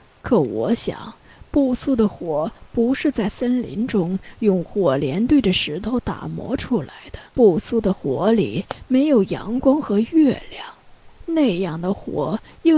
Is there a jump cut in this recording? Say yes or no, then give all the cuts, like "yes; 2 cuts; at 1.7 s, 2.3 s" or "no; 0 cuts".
yes; 2 cuts; at 7.3 s, 11.2 s